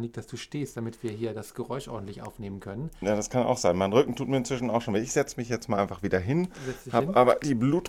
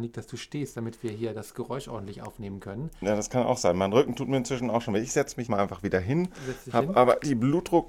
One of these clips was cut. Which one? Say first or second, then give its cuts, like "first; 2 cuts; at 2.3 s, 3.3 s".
second; 1 cut; at 5.5 s